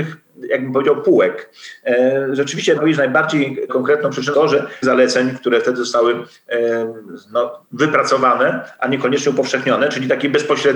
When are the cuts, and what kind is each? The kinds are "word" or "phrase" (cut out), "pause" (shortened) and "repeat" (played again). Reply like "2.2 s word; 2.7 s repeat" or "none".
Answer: 2.8 s word; 3.7 s word; 4.3 s word; 4.8 s phrase; 7.6 s pause